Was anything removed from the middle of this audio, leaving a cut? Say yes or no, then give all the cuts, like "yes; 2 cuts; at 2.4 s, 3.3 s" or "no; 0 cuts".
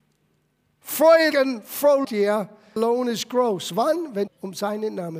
yes; 4 cuts; at 1.3 s, 2.0 s, 2.8 s, 4.3 s